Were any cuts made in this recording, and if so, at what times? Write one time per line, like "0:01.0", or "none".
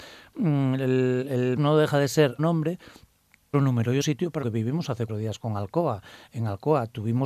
0:01.6
0:02.4
0:03.5
0:04.0
0:04.4
0:05.1